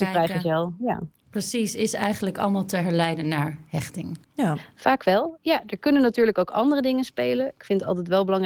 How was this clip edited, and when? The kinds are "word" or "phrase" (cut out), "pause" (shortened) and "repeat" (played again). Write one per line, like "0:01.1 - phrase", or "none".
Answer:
0:04.2 - pause